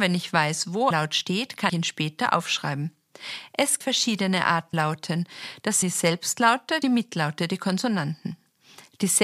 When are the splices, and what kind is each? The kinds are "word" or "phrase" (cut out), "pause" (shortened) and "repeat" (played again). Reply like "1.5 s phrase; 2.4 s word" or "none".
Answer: 0.9 s word; 1.7 s word; 3.8 s phrase; 4.7 s word; 5.8 s word; 6.8 s phrase